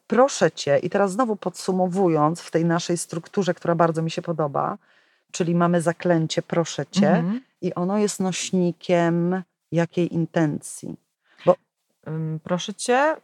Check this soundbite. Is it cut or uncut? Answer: uncut